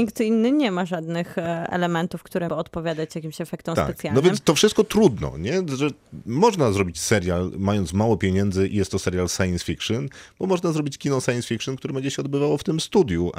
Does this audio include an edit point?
yes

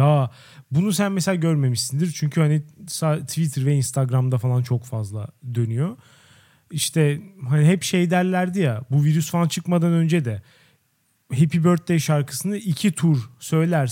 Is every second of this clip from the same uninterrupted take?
yes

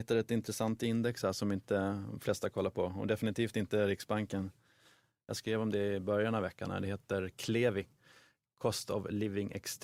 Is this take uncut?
yes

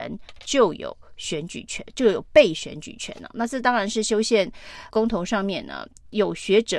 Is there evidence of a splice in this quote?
yes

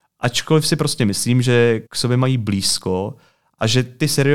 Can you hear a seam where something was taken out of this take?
yes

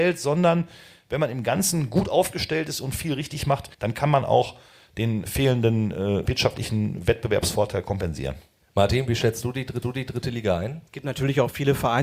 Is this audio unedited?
no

